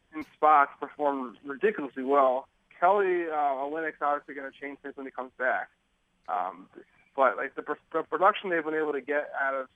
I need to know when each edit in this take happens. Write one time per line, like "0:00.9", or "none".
none